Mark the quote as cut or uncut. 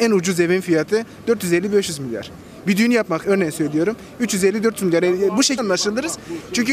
cut